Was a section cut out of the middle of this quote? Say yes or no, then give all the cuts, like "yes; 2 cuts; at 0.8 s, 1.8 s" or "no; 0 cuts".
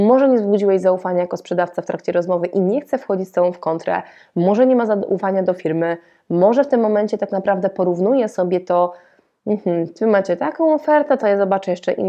yes; 1 cut; at 11.2 s